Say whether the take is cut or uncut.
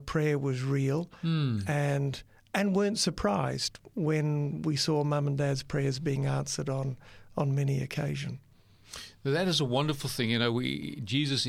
uncut